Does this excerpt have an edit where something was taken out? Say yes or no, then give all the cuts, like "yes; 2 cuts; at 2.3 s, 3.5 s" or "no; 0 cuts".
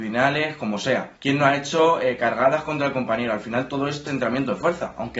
yes; 2 cuts; at 1.2 s, 4.1 s